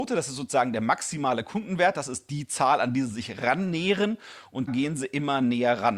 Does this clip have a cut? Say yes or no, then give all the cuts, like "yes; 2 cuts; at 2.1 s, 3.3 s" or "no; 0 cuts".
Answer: yes; 1 cut; at 4.7 s